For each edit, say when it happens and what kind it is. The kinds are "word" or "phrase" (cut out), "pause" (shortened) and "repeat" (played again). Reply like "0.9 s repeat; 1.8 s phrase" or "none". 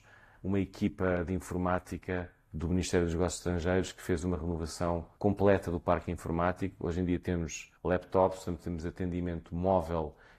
5.2 s pause; 7.8 s pause